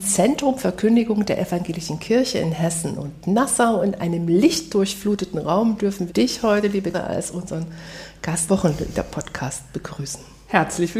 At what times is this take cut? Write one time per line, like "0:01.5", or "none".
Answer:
0:06.1
0:06.9
0:08.5